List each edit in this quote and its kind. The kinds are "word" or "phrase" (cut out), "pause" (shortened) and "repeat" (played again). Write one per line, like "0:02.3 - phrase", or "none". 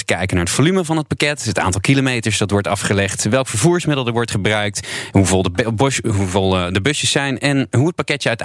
none

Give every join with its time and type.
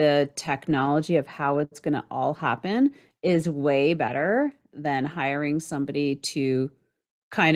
none

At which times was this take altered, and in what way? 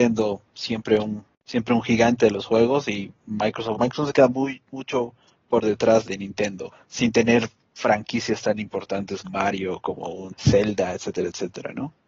0:03.7 - word
0:06.0 - word
0:09.2 - word
0:10.4 - word

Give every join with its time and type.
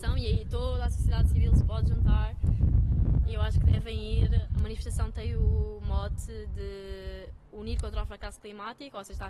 none

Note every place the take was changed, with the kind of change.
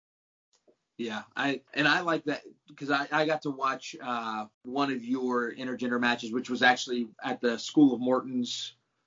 0:01.7 - pause
0:04.5 - pause
0:07.1 - pause

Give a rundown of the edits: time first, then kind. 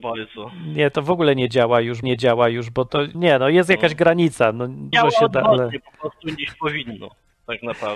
0:02.0 - repeat
0:03.1 - word
0:04.9 - phrase

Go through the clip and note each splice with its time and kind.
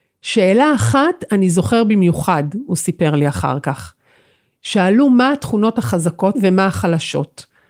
0:06.3 - word

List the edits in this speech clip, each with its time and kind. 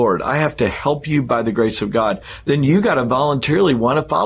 none

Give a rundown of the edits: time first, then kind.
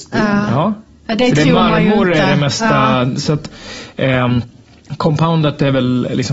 none

